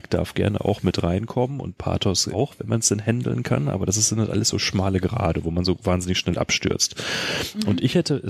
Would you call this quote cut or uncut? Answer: cut